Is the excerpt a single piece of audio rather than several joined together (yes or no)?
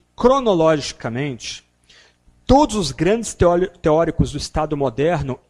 yes